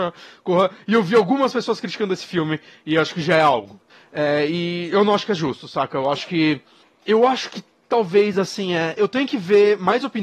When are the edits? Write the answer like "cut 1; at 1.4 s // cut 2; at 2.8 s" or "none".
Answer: none